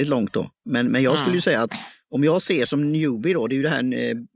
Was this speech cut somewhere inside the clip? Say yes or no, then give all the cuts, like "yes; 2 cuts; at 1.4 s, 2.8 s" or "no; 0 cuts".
no; 0 cuts